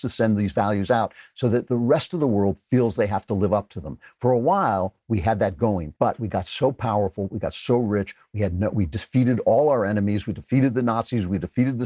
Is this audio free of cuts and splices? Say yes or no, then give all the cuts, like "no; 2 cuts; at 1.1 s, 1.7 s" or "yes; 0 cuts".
no; 1 cut; at 6.0 s